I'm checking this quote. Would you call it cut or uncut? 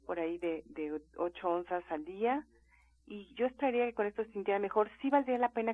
uncut